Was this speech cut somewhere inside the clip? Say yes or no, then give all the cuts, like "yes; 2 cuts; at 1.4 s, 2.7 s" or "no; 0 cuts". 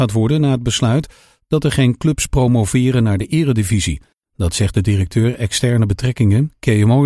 no; 0 cuts